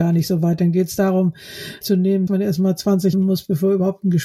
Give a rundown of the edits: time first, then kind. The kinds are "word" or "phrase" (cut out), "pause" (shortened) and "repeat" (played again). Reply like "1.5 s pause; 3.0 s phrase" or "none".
1.8 s word; 2.3 s word; 3.1 s word

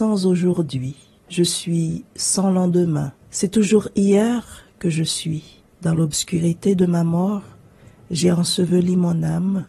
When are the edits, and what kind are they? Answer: 1.2 s pause; 3.2 s pause; 5.7 s pause

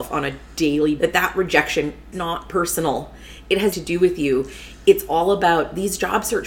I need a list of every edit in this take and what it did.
1.0 s word; 2.1 s word; 3.7 s word

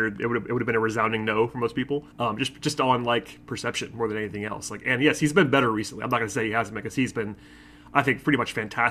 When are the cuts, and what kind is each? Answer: 2.1 s pause

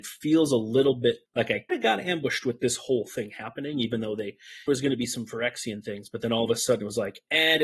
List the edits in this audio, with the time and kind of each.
1.3 s pause; 1.7 s word; 4.7 s phrase

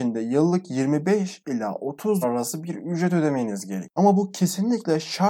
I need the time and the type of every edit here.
2.2 s word

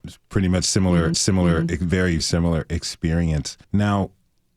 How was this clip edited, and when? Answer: 1.1 s repeat; 2.2 s word; 3.6 s pause

